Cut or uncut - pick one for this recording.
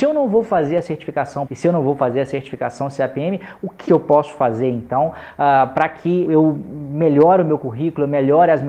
cut